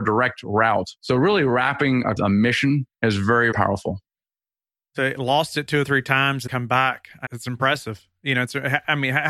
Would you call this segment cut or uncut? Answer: cut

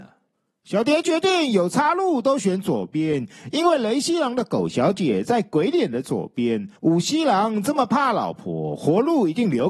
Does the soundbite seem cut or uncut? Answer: cut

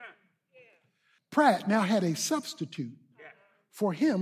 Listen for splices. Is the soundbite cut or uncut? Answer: uncut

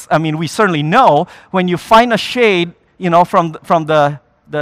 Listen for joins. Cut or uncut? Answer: uncut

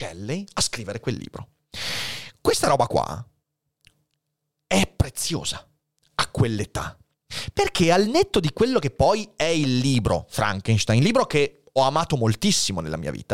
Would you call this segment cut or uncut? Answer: uncut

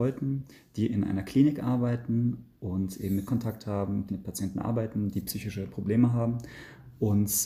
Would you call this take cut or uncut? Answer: cut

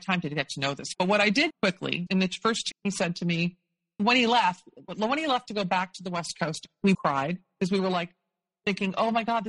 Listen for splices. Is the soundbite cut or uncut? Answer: cut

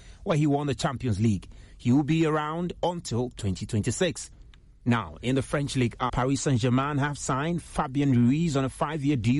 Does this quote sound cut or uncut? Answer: cut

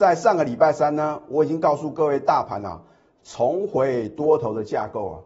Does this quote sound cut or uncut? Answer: uncut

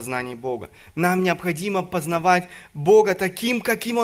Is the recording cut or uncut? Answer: uncut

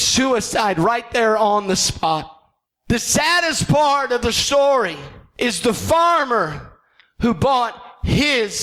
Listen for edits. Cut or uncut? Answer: uncut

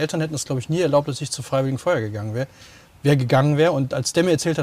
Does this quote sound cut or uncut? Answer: uncut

